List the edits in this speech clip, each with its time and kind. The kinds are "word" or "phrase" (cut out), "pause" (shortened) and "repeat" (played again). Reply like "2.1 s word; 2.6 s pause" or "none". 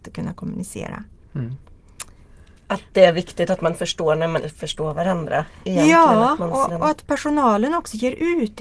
4.4 s word; 6.7 s word